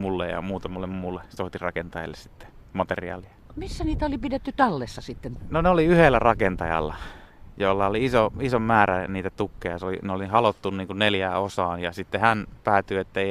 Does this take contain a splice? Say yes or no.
no